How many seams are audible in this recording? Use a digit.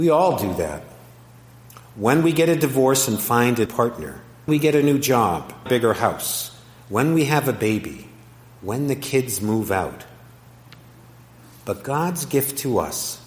3